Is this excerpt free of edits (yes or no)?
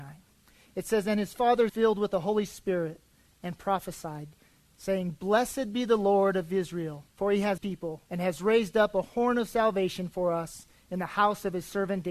no